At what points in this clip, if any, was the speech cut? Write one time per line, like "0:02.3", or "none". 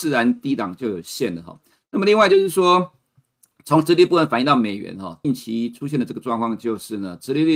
0:05.2